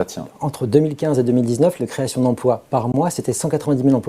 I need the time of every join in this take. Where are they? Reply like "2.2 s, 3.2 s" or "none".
1.8 s